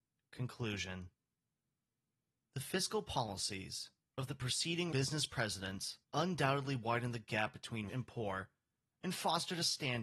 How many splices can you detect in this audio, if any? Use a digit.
3